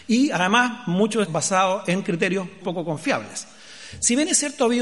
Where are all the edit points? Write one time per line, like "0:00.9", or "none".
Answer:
0:01.3
0:02.6